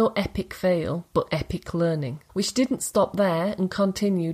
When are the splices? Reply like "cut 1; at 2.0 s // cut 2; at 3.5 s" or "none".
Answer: cut 1; at 2.3 s